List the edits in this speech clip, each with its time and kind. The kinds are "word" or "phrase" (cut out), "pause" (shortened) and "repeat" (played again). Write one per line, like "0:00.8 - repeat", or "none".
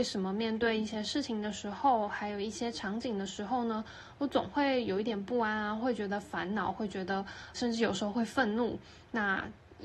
0:07.5 - word